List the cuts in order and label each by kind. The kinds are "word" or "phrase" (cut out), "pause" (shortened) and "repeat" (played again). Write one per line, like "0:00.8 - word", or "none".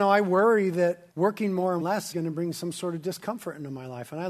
0:01.1 - pause
0:01.8 - word
0:02.1 - word